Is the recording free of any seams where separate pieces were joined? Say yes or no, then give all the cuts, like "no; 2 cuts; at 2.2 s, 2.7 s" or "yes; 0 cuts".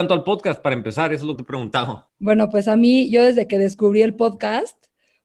no; 2 cuts; at 1.4 s, 2.1 s